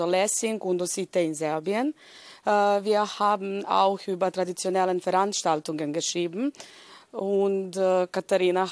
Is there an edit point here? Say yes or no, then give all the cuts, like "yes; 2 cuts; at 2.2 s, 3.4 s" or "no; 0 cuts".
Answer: no; 0 cuts